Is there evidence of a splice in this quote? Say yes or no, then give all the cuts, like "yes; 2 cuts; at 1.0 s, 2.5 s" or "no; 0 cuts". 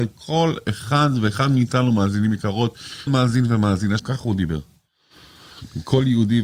yes; 2 cuts; at 3.1 s, 4.0 s